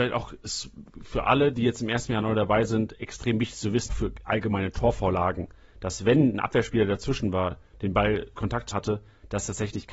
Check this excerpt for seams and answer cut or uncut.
cut